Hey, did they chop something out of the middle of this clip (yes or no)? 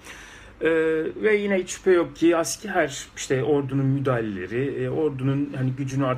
no